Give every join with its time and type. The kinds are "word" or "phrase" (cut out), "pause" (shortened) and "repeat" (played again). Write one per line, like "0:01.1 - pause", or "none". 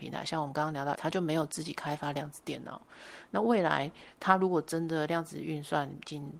0:00.9 - word